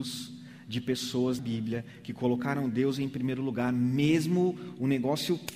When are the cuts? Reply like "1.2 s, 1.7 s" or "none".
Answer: 1.4 s